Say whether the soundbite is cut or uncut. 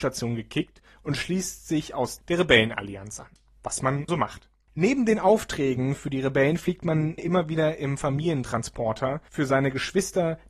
cut